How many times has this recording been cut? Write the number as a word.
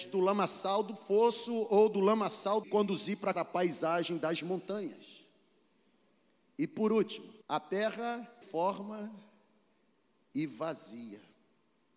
four